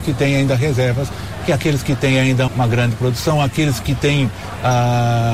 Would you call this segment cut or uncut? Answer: cut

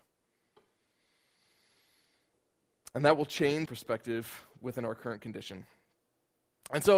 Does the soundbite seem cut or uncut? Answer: cut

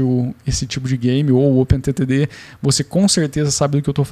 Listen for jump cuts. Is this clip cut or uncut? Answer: uncut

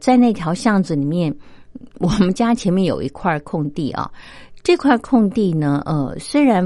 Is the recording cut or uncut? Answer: cut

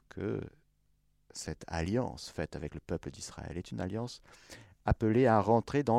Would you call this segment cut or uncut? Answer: uncut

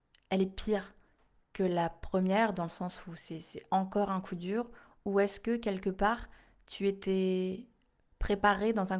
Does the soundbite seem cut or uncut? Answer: uncut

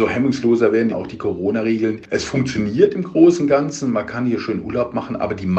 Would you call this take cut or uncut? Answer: cut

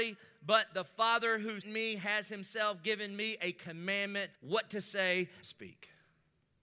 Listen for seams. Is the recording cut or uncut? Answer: cut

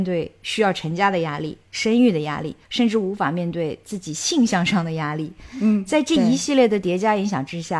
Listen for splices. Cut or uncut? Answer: cut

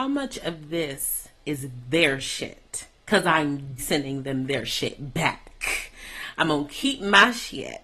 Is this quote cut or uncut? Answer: cut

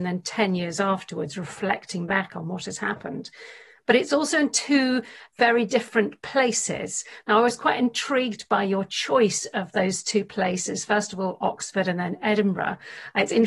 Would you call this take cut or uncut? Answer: uncut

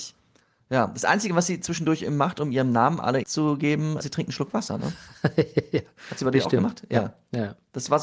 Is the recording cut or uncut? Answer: cut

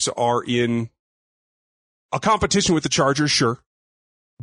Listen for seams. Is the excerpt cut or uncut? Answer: uncut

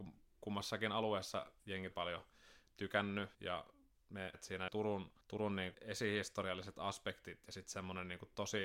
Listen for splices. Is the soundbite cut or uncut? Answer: cut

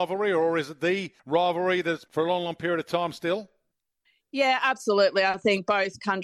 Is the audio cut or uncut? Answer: cut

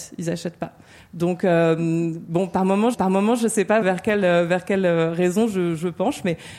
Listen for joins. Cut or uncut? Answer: cut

